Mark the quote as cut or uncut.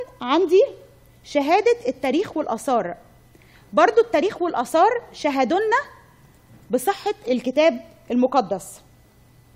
uncut